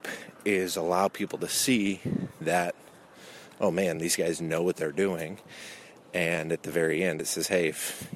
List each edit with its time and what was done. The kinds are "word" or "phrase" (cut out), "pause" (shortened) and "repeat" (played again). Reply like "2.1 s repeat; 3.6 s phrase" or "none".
none